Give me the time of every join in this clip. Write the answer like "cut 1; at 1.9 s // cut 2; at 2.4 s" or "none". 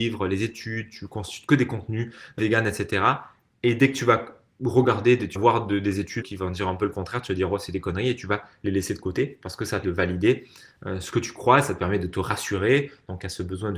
cut 1; at 2.4 s // cut 2; at 5.3 s // cut 3; at 6.2 s // cut 4; at 9.8 s